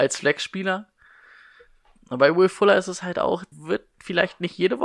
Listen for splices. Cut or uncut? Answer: cut